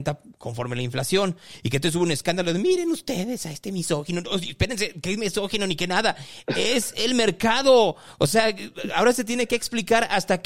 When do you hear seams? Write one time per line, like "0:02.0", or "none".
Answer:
none